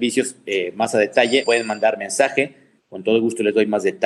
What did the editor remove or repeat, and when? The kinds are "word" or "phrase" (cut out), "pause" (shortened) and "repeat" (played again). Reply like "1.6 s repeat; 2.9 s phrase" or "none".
1.4 s word